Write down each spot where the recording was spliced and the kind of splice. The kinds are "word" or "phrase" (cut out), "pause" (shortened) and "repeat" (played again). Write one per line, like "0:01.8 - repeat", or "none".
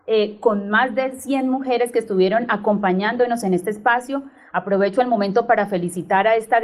none